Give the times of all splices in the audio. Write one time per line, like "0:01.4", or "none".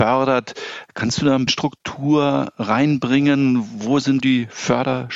0:01.5
0:04.2